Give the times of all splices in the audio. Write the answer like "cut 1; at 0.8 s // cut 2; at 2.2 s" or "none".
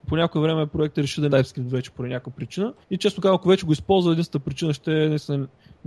cut 1; at 1.3 s // cut 2; at 2.8 s